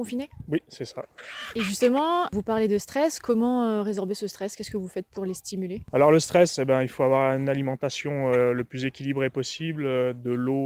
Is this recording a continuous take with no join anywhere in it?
yes; 0 cuts

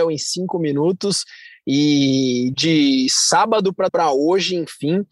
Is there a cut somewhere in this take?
yes; 2 cuts; at 2.5 s, 3.9 s

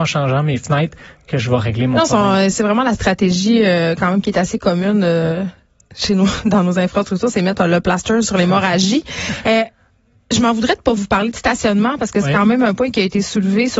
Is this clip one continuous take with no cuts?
yes; 0 cuts

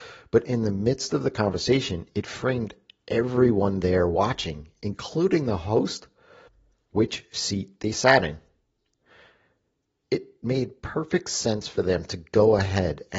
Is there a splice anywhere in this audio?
no; 0 cuts

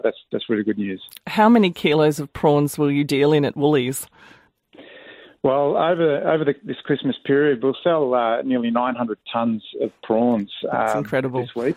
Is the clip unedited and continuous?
yes; 0 cuts

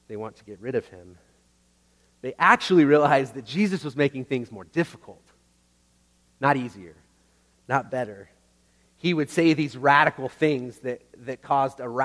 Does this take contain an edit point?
no; 0 cuts

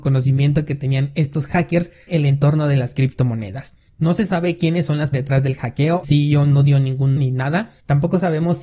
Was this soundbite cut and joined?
yes; 4 cuts; at 2.1 s, 5.1 s, 6.0 s, 7.2 s

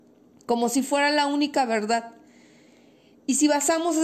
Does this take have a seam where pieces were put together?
no; 0 cuts

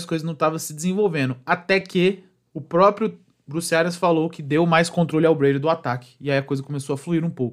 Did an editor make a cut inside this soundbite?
no; 0 cuts

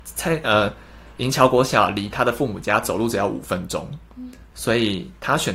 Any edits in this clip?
yes; 1 cut; at 4.5 s

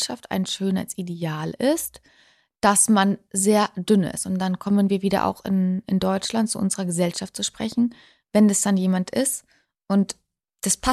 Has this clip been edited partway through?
no; 0 cuts

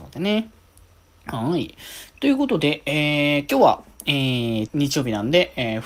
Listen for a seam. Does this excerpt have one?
yes; 1 cut; at 4.7 s

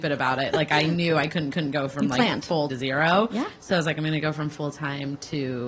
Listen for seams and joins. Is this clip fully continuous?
no; 2 cuts; at 1.5 s, 2.7 s

